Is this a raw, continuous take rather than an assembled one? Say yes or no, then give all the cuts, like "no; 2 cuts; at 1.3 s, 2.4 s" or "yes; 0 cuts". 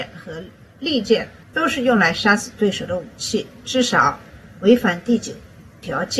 yes; 0 cuts